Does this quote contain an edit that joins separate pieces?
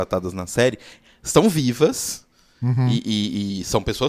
no; 0 cuts

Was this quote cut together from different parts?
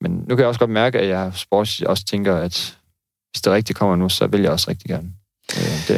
no; 0 cuts

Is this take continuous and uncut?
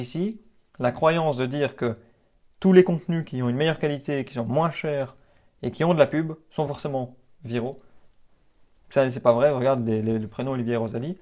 yes; 0 cuts

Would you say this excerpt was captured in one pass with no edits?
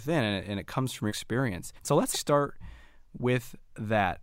no; 3 cuts; at 1.1 s, 1.8 s, 2.1 s

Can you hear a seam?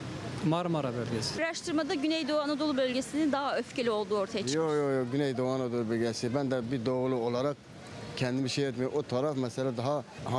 no; 0 cuts

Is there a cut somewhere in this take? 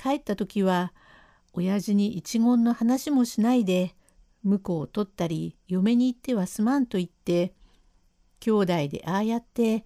no; 0 cuts

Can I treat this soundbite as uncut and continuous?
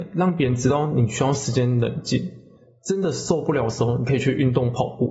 yes; 0 cuts

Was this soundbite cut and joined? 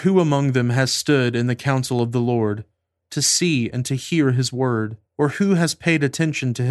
yes; 1 cut; at 5.1 s

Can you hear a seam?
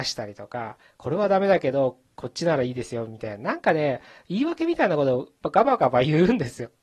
no; 0 cuts

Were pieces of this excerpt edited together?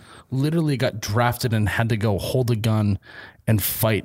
no; 0 cuts

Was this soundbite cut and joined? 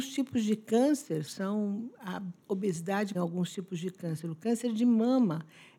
yes; 2 cuts; at 1.3 s, 3.1 s

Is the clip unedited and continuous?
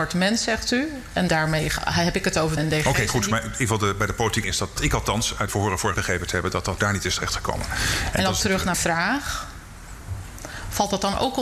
no; 8 cuts; at 1.3 s, 2.6 s, 4.4 s, 4.8 s, 5.5 s, 5.9 s, 6.8 s, 8.7 s

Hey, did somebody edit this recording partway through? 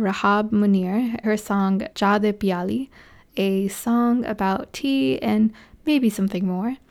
yes; 2 cuts; at 1.2 s, 1.9 s

